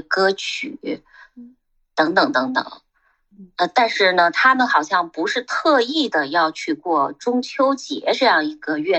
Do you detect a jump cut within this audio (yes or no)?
no